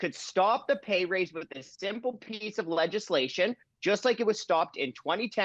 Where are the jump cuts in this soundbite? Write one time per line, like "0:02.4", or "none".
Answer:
none